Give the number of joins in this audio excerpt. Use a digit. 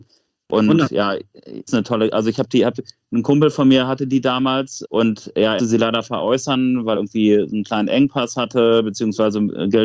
4